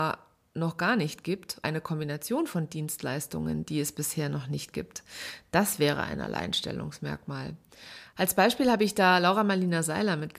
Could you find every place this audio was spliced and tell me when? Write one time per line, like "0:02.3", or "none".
0:01.6